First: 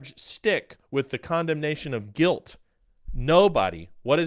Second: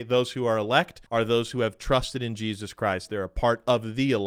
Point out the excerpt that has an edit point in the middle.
second; 1 cut; at 1.1 s

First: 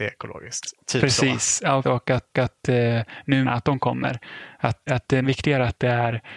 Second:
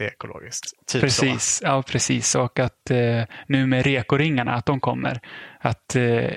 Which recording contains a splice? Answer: first; 5 cuts; at 1.8 s, 2.3 s, 3.4 s, 4.9 s, 5.2 s

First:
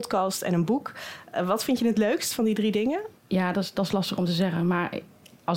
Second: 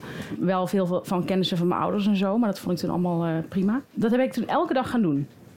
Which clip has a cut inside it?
first; 1 cut; at 3.2 s

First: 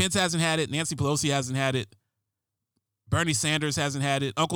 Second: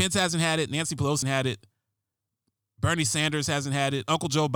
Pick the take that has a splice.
second; 1 cut; at 1.2 s

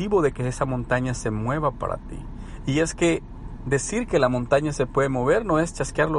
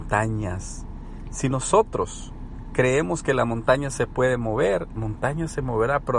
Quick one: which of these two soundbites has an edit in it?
second; 1 cut; at 5.0 s

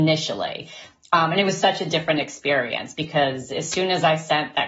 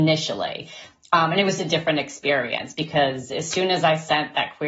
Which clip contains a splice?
second; 1 cut; at 1.6 s

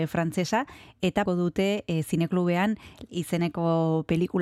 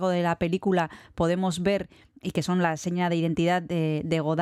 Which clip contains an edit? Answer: first; 2 cuts; at 1.3 s, 3.1 s

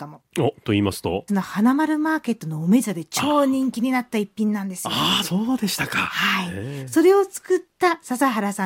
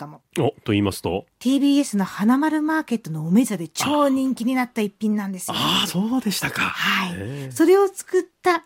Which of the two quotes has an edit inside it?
first; 1 cut; at 1.3 s

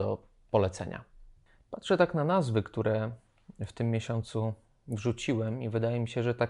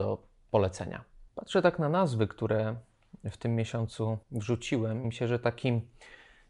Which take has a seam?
second; 3 cuts; at 1.3 s, 4.2 s, 5.0 s

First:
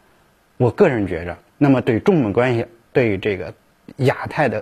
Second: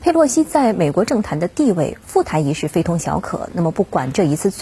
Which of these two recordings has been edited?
first; 1 cut; at 1.5 s

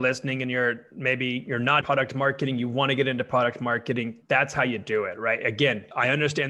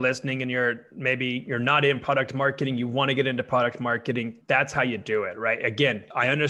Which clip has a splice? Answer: first; 1 cut; at 1.8 s

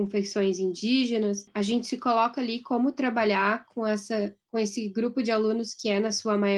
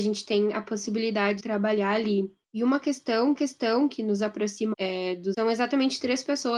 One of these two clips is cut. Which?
second; 4 cuts; at 1.4 s, 3.4 s, 4.7 s, 5.3 s

